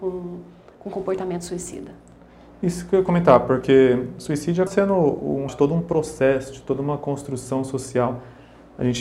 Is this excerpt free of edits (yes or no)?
no